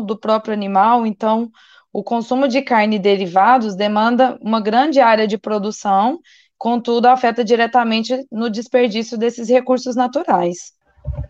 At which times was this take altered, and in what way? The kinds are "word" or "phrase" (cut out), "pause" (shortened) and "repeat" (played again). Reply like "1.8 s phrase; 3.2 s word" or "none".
none